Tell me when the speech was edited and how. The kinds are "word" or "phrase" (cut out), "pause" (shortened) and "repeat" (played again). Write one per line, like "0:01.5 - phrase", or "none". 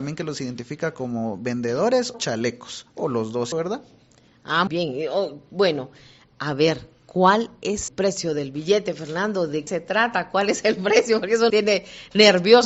0:02.1 - word
0:03.5 - word
0:04.7 - word
0:07.9 - word
0:09.7 - word
0:11.5 - word